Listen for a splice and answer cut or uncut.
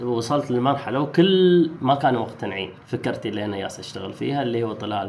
cut